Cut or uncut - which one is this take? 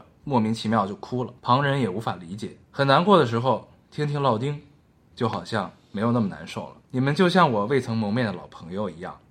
cut